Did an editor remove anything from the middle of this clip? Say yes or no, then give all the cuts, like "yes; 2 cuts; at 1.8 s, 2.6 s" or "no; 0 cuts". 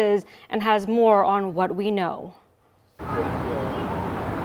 no; 0 cuts